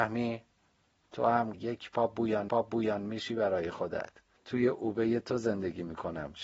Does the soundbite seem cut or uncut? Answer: cut